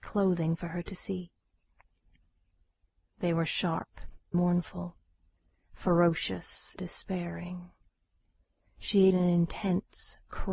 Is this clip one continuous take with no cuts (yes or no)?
no